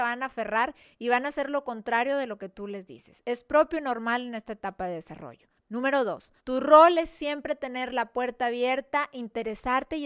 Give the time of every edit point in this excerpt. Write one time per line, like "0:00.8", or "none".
0:05.6
0:06.4